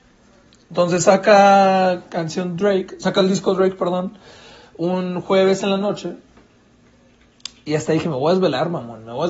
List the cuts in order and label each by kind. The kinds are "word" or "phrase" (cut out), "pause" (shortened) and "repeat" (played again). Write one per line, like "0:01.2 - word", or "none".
none